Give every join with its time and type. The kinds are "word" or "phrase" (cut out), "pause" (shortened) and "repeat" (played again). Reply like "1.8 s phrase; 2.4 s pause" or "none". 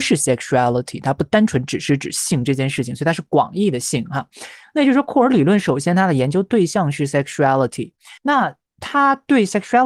8.2 s pause

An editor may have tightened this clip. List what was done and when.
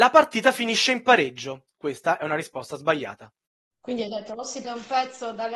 3.5 s pause; 4.6 s word

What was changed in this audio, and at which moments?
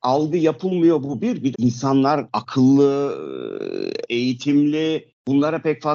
1.5 s word; 4.1 s word

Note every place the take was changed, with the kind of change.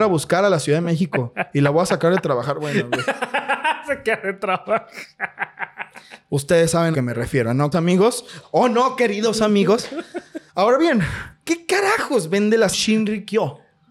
6.9 s phrase; 7.7 s word; 10.5 s pause; 11.4 s word; 12.7 s phrase

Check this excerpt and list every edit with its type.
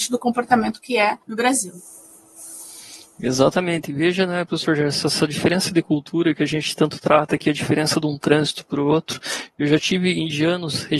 1.2 s pause

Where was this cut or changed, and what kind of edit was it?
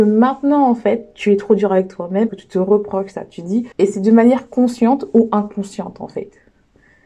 2.3 s word; 3.7 s pause

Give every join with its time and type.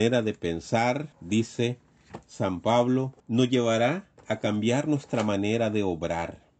1.1 s pause; 3.2 s pause

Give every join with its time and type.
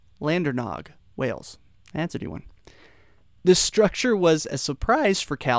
1.7 s pause; 2.2 s word

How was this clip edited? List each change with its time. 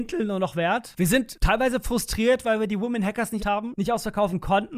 3.4 s word

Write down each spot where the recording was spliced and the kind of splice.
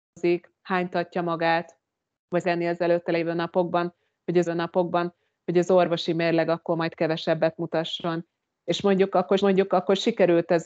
2.4 s phrase; 4.5 s repeat; 9.4 s repeat

